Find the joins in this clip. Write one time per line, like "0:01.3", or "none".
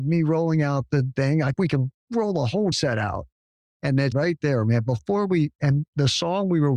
0:01.1
0:01.5
0:02.0
0:02.7
0:04.1